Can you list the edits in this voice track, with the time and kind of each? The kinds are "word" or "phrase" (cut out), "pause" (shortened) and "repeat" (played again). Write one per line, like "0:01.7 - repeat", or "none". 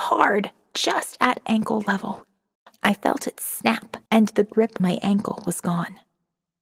0:02.5 - pause
0:04.1 - pause
0:04.8 - word